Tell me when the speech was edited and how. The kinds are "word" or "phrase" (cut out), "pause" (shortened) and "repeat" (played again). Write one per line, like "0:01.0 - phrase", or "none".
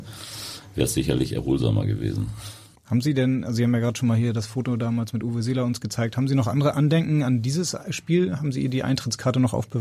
0:02.7 - pause